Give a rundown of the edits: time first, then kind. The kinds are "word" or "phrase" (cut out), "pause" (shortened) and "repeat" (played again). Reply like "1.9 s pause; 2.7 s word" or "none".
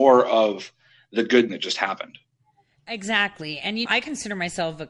1.5 s word; 3.9 s word